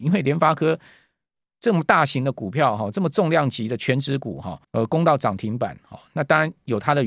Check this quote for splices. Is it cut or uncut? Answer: cut